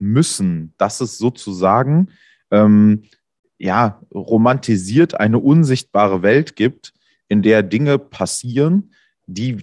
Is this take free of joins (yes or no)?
yes